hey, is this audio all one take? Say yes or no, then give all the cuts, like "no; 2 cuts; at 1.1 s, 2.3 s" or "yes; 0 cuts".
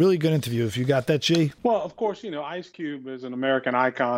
no; 1 cut; at 1.6 s